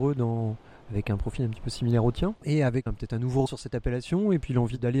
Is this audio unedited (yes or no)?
no